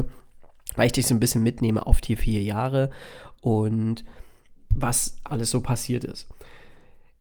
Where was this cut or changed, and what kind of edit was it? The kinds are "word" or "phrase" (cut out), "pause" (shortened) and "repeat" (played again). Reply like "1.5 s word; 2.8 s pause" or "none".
5.3 s word